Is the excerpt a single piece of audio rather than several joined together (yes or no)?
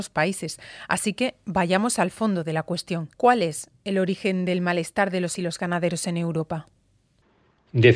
no